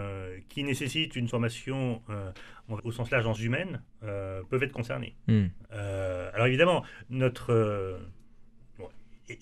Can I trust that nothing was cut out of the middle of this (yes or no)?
no